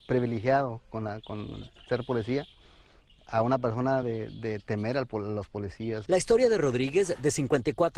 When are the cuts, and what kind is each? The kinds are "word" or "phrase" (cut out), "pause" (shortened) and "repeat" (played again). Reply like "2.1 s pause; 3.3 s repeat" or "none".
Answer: none